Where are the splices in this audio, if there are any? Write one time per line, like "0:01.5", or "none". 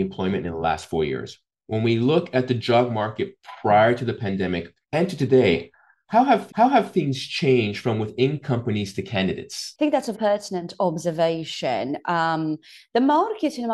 0:04.8
0:06.5
0:10.1